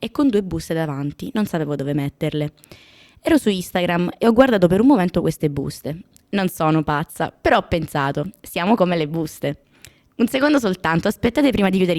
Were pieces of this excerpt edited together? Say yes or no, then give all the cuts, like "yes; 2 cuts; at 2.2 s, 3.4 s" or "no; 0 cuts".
no; 0 cuts